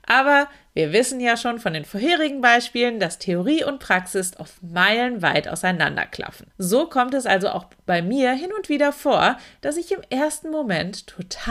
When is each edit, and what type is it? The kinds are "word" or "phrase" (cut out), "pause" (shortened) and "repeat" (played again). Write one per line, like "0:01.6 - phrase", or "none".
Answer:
0:06.5 - pause